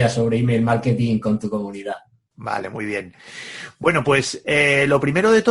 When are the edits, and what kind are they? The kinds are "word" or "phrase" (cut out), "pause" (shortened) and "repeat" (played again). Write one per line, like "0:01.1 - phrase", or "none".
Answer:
none